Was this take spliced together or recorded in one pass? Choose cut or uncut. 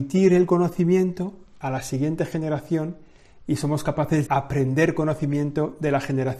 cut